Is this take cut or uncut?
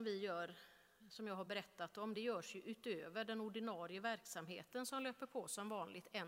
uncut